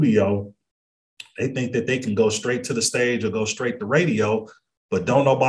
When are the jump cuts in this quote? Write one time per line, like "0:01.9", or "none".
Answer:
none